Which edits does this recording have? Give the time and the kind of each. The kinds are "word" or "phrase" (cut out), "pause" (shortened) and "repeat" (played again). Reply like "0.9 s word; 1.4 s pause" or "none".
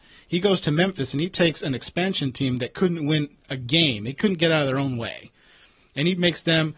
none